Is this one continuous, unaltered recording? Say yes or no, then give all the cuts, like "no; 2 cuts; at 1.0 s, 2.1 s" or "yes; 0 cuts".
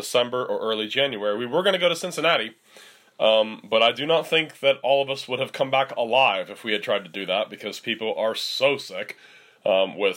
yes; 0 cuts